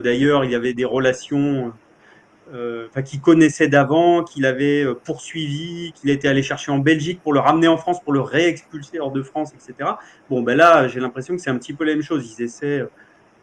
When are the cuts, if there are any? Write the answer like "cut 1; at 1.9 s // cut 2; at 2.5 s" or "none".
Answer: none